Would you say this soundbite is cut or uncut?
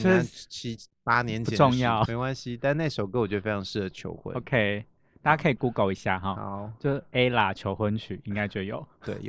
cut